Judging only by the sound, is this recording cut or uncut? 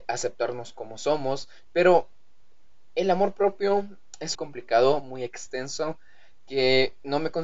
cut